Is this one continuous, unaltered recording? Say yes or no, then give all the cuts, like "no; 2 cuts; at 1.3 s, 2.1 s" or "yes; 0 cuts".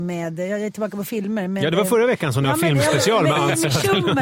yes; 0 cuts